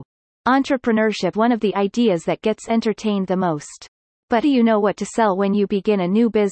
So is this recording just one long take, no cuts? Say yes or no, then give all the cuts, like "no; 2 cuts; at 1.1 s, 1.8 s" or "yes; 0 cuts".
no; 2 cuts; at 1.3 s, 4.4 s